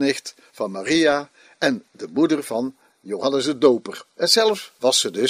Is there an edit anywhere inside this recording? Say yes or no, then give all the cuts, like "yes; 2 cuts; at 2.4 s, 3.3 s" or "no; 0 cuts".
no; 0 cuts